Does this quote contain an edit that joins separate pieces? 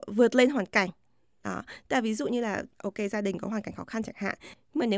no; 0 cuts

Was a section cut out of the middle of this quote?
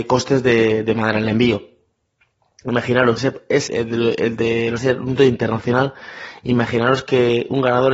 yes; 4 cuts; at 3.2 s, 3.7 s, 4.8 s, 5.2 s

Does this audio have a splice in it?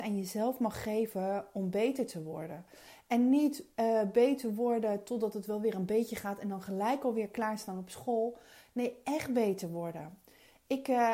no; 0 cuts

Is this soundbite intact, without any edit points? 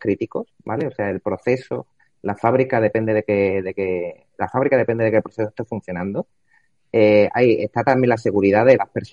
yes; 0 cuts

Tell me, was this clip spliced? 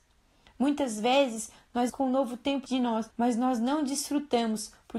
yes; 3 cuts; at 1.9 s, 2.7 s, 3.1 s

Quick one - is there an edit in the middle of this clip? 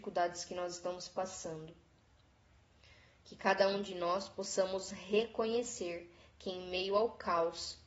no; 0 cuts

